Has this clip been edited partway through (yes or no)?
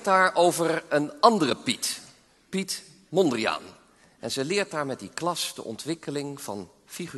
no